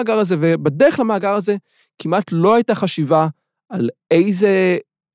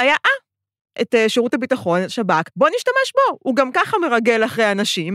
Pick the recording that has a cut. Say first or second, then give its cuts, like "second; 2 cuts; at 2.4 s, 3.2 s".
second; 2 cuts; at 1.0 s, 2.5 s